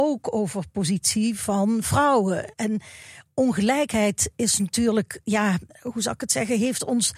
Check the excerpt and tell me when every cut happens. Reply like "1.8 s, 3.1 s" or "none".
5.7 s